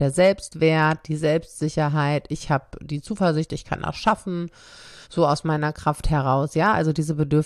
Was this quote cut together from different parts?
yes; 1 cut; at 5.0 s

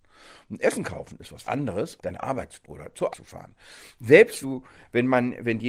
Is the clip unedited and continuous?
no; 5 cuts; at 1.4 s, 2.0 s, 2.6 s, 3.1 s, 4.4 s

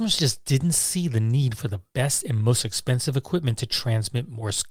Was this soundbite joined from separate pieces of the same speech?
no; 0 cuts

